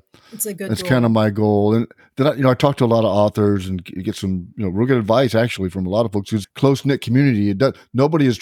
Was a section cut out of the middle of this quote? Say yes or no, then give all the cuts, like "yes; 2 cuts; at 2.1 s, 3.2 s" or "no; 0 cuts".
yes; 1 cut; at 6.4 s